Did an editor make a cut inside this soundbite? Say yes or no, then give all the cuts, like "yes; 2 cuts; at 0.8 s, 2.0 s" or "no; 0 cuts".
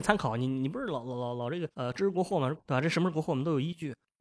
yes; 1 cut; at 1.7 s